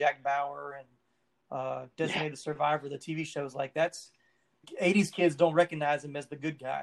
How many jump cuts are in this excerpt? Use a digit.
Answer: 1